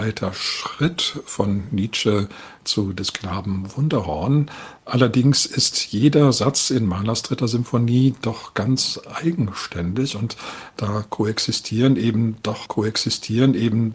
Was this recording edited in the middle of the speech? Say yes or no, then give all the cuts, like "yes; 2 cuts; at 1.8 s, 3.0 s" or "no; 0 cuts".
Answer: yes; 1 cut; at 12.7 s